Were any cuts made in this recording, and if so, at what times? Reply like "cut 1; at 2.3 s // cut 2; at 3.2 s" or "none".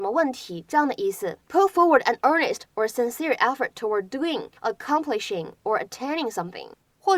cut 1; at 1.4 s // cut 2; at 4.6 s